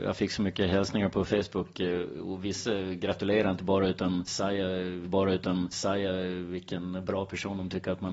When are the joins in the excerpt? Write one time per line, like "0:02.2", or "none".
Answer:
0:05.0